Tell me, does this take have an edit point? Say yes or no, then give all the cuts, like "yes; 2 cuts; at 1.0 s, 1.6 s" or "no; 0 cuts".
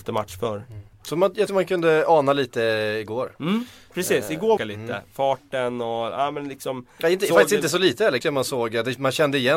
yes; 4 cuts; at 0.9 s, 1.5 s, 4.6 s, 8.2 s